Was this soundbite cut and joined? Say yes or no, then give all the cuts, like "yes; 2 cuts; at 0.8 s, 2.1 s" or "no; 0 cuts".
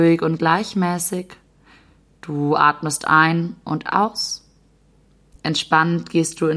no; 0 cuts